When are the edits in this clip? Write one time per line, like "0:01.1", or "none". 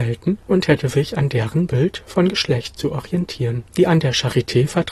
0:03.7